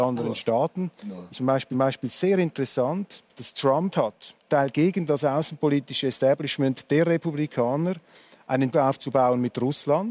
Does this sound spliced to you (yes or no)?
yes